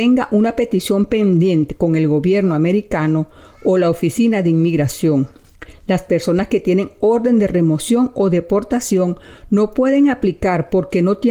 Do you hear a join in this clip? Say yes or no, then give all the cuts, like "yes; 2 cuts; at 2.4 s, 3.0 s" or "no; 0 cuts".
no; 0 cuts